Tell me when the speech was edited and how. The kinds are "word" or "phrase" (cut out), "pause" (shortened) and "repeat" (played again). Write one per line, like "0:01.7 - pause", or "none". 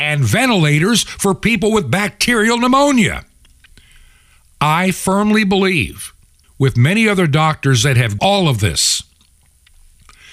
0:03.7 - pause
0:06.4 - pause
0:08.2 - phrase